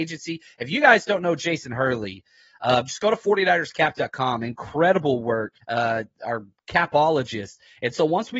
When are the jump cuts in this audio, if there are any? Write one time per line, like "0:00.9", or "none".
0:05.6